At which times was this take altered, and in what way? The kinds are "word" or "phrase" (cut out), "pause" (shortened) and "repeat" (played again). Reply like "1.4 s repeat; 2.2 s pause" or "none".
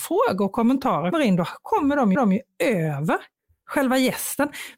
1.1 s word; 2.2 s repeat